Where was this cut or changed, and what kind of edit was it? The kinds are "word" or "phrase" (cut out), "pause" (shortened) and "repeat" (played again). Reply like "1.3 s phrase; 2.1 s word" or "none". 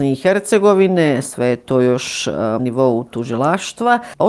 2.6 s word